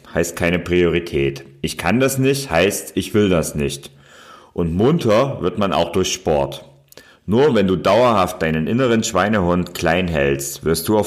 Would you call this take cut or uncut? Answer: uncut